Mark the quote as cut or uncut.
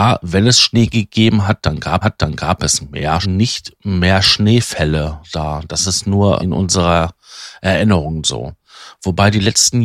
cut